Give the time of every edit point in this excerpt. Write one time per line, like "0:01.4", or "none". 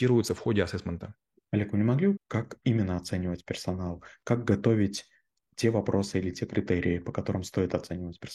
0:01.3
0:02.2